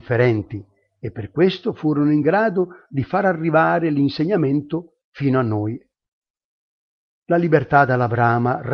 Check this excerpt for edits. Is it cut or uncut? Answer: uncut